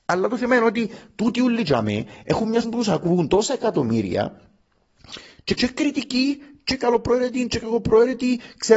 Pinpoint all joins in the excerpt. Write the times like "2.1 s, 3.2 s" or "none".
2.6 s, 5.6 s